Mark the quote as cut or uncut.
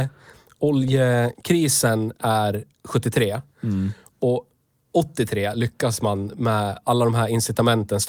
uncut